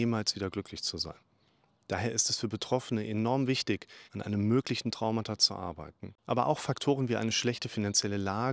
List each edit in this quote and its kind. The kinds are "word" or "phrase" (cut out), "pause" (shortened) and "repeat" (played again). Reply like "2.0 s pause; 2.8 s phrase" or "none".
4.0 s pause